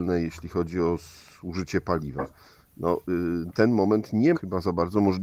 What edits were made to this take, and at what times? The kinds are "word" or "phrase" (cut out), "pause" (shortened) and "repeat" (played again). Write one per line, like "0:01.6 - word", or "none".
0:03.5 - word
0:04.3 - word